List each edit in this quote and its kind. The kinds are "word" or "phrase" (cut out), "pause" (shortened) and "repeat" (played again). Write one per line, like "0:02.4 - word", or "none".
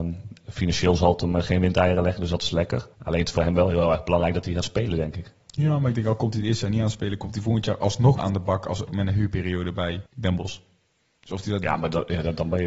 0:02.9 - pause
0:08.2 - word
0:08.9 - word
0:10.1 - pause